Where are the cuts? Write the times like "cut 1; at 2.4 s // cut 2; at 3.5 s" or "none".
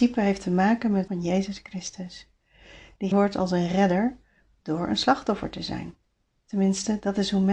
cut 1; at 1.1 s // cut 2; at 3.1 s